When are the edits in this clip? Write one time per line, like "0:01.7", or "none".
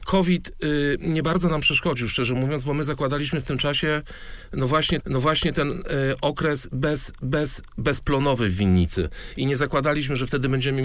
0:05.0
0:07.2